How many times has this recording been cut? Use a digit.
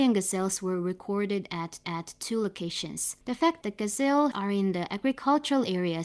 4